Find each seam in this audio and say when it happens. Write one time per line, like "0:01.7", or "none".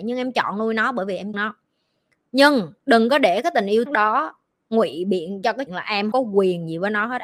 0:01.3
0:03.9
0:05.7
0:06.1